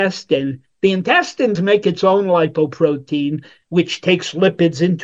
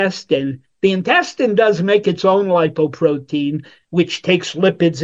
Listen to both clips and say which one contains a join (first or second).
first